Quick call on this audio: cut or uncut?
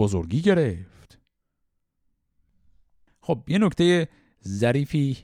uncut